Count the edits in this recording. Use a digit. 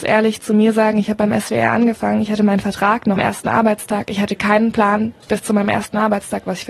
1